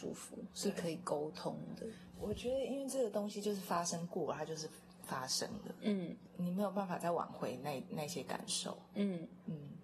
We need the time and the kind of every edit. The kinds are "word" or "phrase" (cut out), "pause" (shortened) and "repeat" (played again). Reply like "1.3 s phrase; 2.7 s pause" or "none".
none